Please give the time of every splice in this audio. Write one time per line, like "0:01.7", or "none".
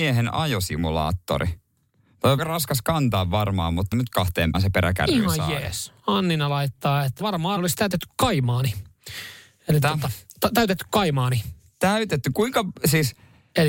0:02.4
0:03.9
0:04.5
0:07.2
0:07.6
0:09.8